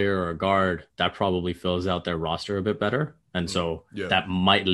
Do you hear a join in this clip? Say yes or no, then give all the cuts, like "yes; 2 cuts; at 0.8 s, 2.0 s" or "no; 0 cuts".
yes; 1 cut; at 0.9 s